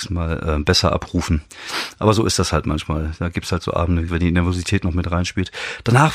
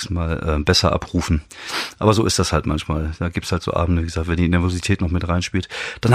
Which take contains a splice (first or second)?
first